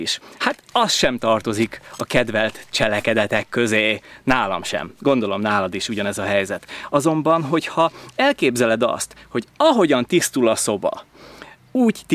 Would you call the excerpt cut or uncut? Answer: uncut